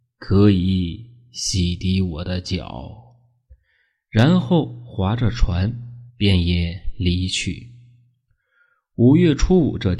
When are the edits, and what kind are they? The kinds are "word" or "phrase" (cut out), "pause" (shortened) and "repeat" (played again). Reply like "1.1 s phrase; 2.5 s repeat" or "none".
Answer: 6.1 s pause